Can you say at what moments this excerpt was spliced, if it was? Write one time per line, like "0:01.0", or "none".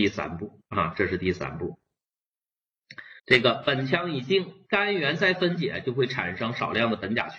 0:03.2